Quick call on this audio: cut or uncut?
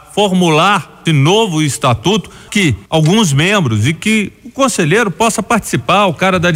cut